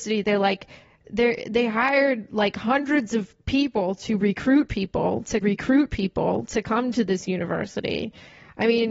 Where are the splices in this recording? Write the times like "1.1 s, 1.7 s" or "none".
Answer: 5.4 s